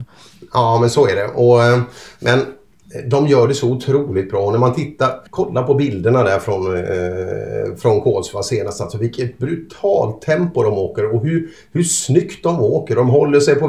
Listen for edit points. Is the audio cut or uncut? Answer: cut